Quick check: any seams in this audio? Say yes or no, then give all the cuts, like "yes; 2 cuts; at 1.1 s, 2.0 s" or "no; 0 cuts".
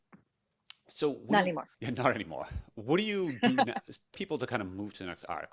yes; 2 cuts; at 1.7 s, 4.1 s